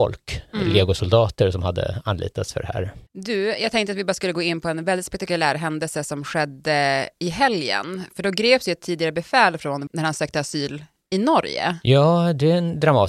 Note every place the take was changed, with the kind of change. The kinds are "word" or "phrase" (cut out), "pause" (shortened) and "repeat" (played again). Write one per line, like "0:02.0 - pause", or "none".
0:03.1 - pause
0:09.9 - word